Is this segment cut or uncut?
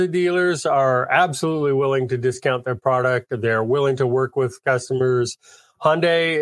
uncut